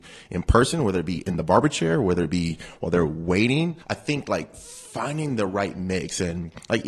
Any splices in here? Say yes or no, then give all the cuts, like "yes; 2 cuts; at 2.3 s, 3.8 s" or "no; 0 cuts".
yes; 1 cut; at 3.8 s